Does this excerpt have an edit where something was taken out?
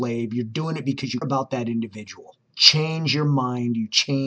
yes; 2 cuts; at 1.2 s, 2.5 s

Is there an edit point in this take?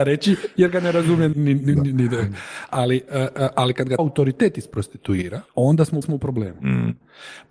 yes; 4 cuts; at 1.3 s, 4.0 s, 5.5 s, 6.0 s

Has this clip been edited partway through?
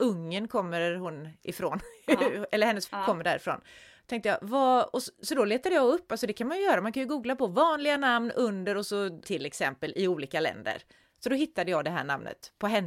yes; 2 cuts; at 2.9 s, 9.2 s

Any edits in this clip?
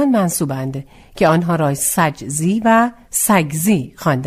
no; 0 cuts

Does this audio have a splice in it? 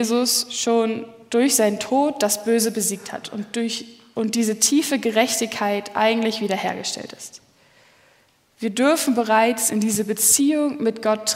no; 0 cuts

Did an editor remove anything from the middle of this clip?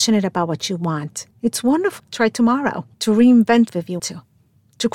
yes; 5 cuts; at 1.3 s, 2.0 s, 2.9 s, 3.7 s, 4.0 s

